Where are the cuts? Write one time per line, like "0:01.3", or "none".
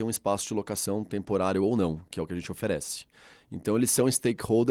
none